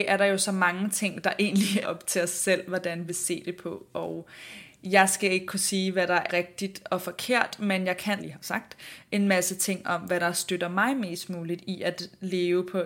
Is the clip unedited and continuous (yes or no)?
no